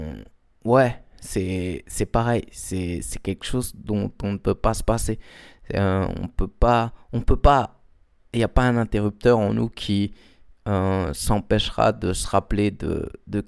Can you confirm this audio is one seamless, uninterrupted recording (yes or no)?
yes